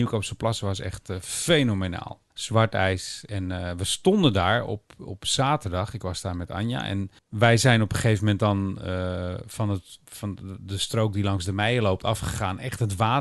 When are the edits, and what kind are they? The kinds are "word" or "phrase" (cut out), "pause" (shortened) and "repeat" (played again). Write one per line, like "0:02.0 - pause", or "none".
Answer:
0:02.3 - pause
0:07.2 - pause